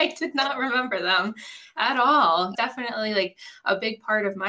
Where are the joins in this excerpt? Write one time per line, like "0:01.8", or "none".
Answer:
0:02.5